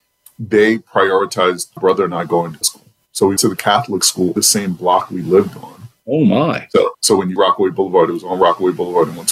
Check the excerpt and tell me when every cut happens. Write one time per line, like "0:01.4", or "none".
0:01.8
0:02.6
0:03.4
0:04.4
0:07.4